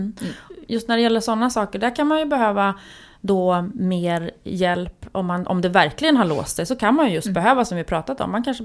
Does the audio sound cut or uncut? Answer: uncut